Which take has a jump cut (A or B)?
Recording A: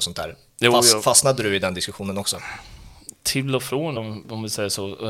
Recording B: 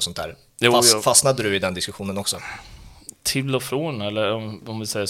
A